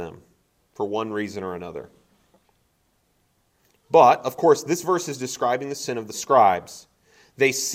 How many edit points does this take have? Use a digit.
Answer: 0